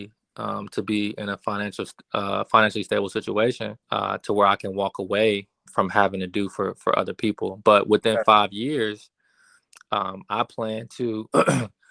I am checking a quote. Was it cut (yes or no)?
yes